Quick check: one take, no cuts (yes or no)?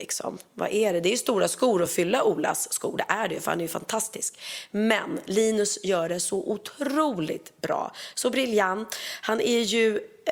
yes